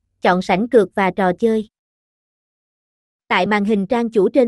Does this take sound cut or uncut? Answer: uncut